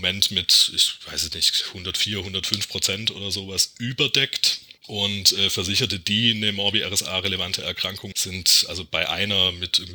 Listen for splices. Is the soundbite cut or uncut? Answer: cut